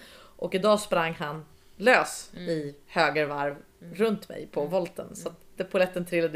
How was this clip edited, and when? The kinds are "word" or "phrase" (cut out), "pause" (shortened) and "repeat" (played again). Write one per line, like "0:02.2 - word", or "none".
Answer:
none